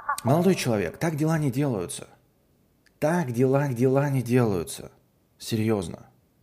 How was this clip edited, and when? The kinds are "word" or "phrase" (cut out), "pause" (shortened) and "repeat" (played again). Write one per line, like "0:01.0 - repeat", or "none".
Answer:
0:03.7 - repeat